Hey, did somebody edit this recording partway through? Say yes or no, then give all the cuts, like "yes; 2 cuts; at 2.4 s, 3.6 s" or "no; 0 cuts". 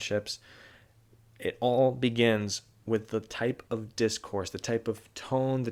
no; 0 cuts